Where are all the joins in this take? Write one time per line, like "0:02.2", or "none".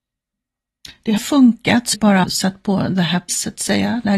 0:01.2
0:01.9
0:02.2
0:03.3

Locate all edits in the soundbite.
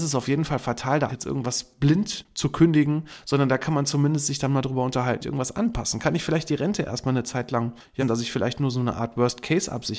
0:01.1
0:05.2
0:08.0

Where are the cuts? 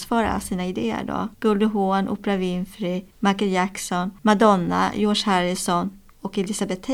0:01.3
0:03.1
0:04.2

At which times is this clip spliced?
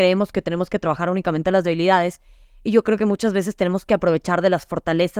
none

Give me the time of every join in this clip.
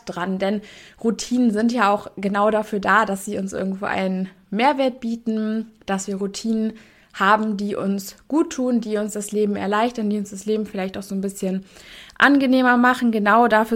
none

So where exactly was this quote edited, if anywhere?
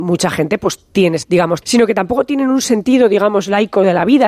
0:01.2
0:01.6

